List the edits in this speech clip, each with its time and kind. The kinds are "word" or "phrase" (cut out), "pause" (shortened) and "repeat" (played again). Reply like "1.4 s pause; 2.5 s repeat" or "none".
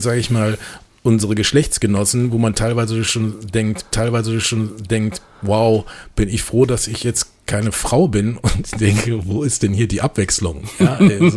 3.9 s repeat